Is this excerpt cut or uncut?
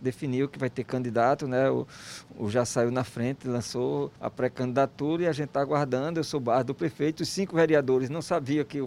cut